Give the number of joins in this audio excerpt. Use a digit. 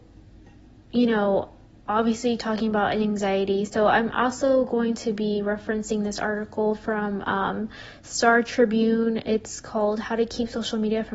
0